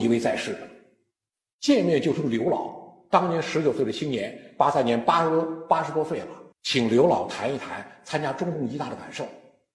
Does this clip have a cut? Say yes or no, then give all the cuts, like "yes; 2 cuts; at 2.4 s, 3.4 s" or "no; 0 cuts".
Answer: yes; 1 cut; at 6.5 s